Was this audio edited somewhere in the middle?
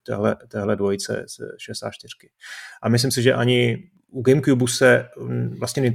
no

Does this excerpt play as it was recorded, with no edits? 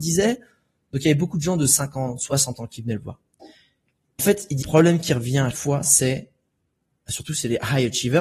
no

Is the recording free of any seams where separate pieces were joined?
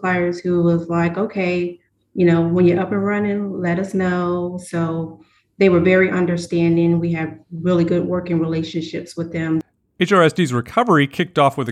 yes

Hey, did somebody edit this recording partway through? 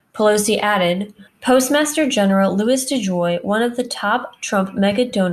yes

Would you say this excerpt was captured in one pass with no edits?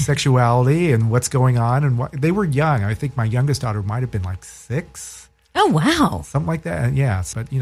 yes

